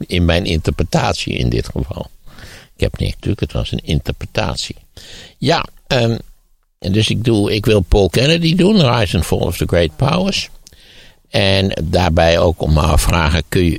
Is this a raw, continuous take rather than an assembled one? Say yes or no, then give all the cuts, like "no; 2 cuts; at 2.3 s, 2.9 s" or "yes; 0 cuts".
no; 1 cut; at 3.1 s